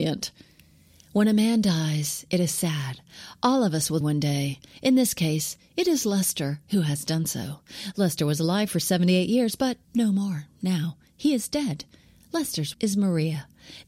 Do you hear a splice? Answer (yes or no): yes